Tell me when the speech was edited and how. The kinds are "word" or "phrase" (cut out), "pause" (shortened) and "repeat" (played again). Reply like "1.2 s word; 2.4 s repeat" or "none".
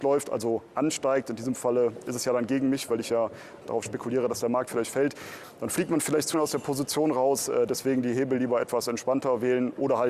3.6 s word; 6.3 s word